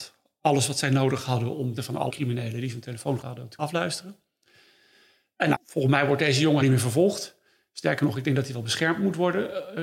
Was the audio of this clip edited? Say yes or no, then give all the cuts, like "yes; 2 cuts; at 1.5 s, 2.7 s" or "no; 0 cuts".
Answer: yes; 6 cuts; at 1.8 s, 2.1 s, 3.2 s, 3.6 s, 5.5 s, 6.6 s